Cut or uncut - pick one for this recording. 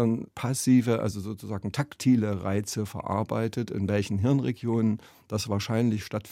uncut